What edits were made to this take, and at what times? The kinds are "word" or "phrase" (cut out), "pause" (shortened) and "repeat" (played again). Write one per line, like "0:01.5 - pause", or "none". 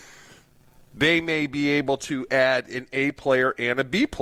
none